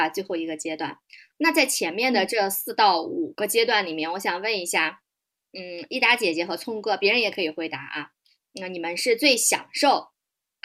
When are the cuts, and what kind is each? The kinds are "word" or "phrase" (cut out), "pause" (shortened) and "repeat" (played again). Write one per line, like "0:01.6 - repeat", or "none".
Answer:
none